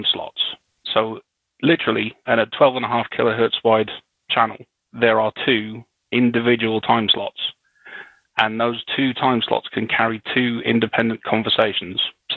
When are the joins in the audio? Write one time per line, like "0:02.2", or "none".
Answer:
none